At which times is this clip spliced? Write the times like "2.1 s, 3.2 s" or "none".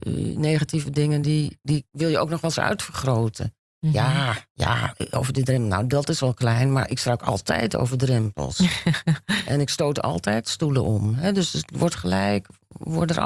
none